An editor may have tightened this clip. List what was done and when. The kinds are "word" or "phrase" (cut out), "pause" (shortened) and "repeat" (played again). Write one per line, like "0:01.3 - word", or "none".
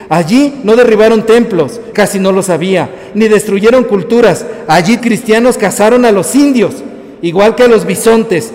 0:01.9 - word
0:05.0 - word